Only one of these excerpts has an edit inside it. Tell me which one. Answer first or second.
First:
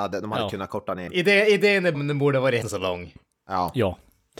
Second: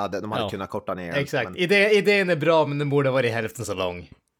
first